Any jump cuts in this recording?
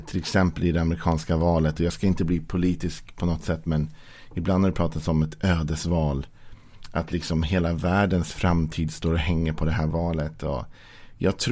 no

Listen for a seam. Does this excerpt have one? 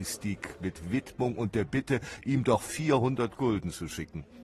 no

